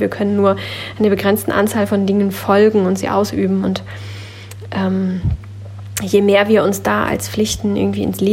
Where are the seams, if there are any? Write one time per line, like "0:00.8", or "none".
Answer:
none